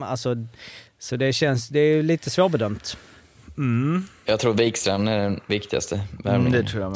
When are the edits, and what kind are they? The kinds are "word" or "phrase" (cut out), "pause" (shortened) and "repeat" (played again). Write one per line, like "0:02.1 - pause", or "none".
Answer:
none